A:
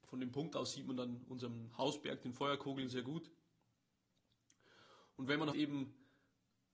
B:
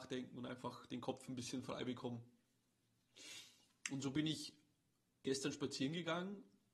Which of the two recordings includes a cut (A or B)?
A